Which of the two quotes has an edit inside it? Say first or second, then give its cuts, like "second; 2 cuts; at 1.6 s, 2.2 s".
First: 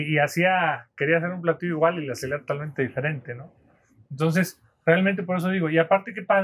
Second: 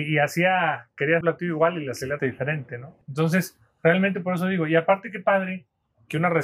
second; 3 cuts; at 1.2 s, 2.2 s, 3.0 s